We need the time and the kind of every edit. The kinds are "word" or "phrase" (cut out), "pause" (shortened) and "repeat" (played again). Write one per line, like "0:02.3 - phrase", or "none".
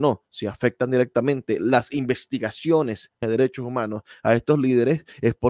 0:03.2 - word